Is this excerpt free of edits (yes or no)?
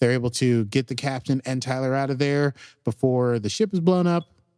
yes